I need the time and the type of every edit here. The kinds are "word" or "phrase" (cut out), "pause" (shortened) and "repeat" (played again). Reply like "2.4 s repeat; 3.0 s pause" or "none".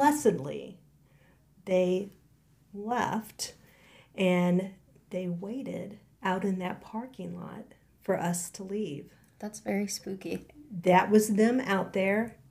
none